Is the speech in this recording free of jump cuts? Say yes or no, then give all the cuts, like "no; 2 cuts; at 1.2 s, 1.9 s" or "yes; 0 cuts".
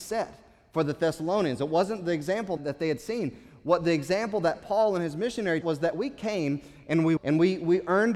no; 3 cuts; at 2.6 s, 5.6 s, 7.2 s